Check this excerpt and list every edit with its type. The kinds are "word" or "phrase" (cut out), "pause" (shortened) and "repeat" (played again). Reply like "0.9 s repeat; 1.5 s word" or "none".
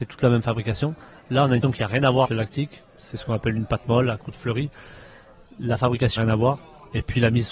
1.6 s word; 2.2 s word; 6.2 s word